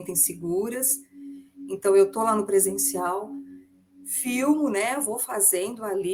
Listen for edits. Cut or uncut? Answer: uncut